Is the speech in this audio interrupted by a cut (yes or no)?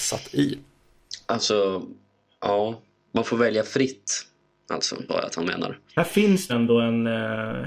yes